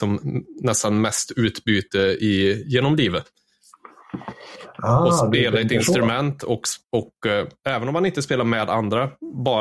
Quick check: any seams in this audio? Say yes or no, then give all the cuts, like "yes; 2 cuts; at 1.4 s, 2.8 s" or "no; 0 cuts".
yes; 1 cut; at 6.8 s